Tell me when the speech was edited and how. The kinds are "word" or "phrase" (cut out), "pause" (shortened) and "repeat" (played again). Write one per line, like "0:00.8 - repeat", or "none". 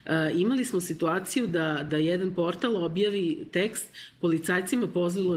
none

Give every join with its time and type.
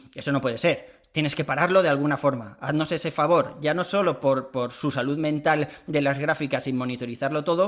none

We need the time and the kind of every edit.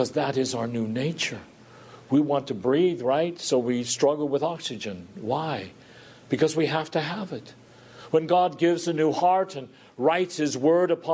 none

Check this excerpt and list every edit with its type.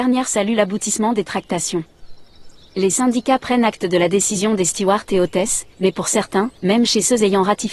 0:05.7 - pause
0:06.6 - pause

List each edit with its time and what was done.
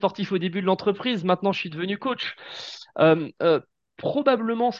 none

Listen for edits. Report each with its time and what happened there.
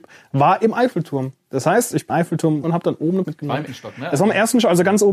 0:02.1 - word
0:02.6 - word
0:03.2 - word
0:03.7 - word

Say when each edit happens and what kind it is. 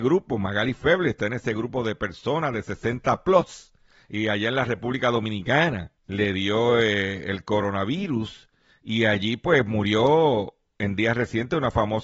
0:06.0 - pause

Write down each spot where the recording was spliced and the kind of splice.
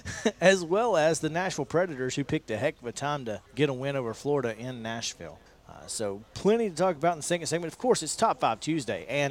0:03.5 - pause
0:05.5 - pause

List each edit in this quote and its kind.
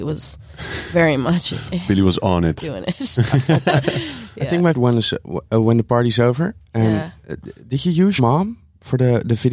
0:04.7 - word
0:08.2 - word

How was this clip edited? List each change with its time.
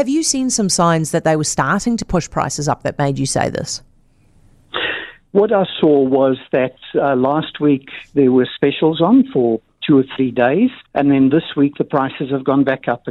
0:10.8 - pause

